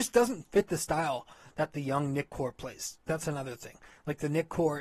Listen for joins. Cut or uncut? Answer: uncut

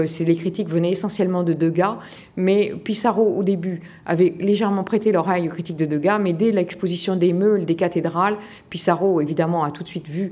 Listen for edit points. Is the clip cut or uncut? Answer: uncut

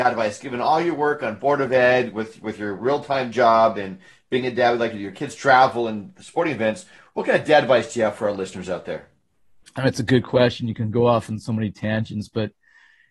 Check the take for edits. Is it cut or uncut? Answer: uncut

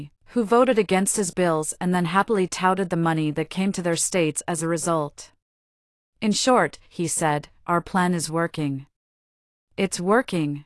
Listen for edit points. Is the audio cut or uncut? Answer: uncut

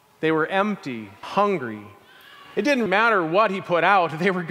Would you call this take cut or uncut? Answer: cut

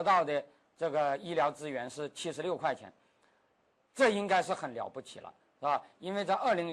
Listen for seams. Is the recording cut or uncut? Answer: uncut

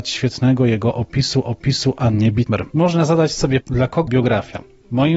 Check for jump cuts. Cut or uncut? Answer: cut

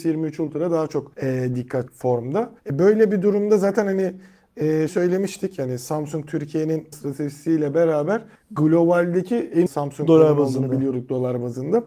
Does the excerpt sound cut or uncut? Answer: cut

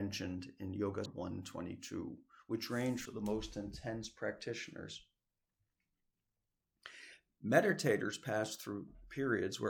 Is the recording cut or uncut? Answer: cut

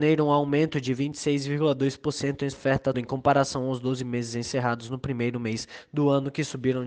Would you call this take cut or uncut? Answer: cut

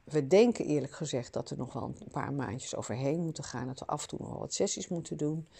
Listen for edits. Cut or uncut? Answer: uncut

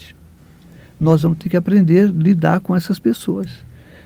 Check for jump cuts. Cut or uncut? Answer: uncut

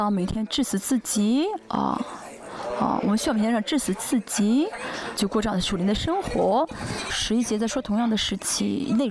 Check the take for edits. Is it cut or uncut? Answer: cut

